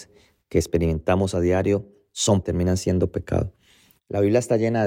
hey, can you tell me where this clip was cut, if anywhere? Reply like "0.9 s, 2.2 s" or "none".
2.4 s